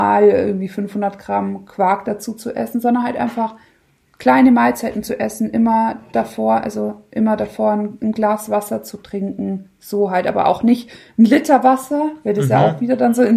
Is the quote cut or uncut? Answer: uncut